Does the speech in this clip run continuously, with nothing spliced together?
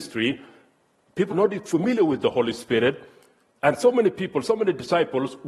no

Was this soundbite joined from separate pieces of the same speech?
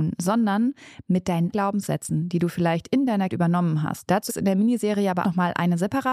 yes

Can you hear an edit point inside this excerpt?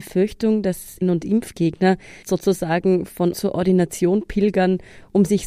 yes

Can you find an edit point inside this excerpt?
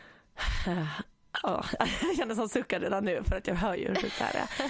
no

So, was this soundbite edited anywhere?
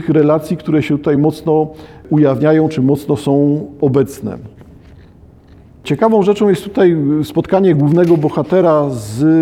no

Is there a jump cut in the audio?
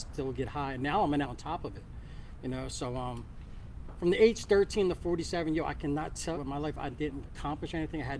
yes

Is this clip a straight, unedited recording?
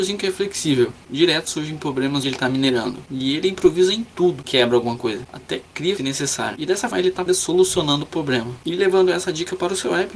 no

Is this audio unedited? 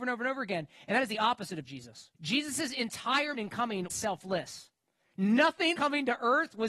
no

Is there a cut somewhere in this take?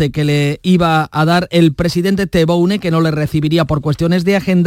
no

